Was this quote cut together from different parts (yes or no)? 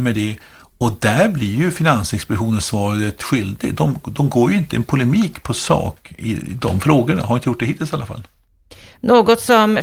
no